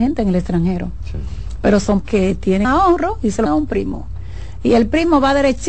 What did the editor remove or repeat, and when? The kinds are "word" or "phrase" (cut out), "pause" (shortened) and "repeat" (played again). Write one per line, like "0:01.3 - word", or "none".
0:02.0 - word
0:02.6 - word
0:03.5 - word